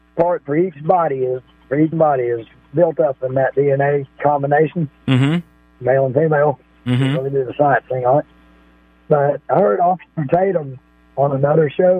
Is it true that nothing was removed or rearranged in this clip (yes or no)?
no